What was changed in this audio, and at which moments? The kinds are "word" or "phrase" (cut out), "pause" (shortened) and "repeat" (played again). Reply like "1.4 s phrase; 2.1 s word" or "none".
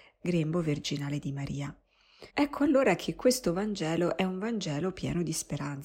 2.3 s pause

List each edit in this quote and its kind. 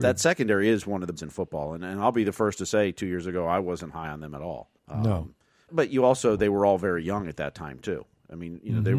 1.2 s phrase; 4.8 s pause; 5.7 s word

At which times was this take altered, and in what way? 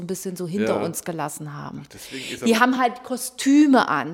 none

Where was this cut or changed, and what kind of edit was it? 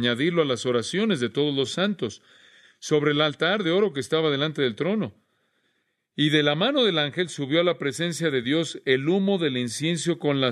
none

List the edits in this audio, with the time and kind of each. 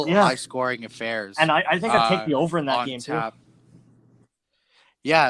none

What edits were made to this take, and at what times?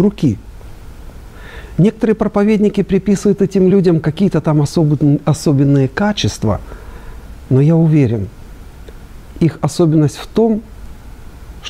none

